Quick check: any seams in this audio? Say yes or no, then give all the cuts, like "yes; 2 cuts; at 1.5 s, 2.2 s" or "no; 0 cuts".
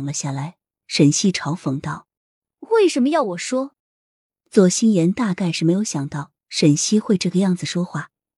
yes; 2 cuts; at 2.2 s, 3.8 s